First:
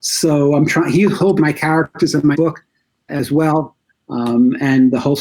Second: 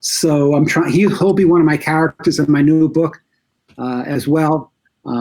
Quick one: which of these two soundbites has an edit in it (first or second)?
first